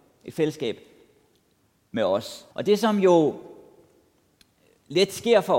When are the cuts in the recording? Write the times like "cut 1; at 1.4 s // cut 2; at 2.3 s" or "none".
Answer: cut 1; at 2.5 s